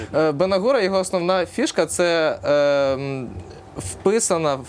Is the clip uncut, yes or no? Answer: yes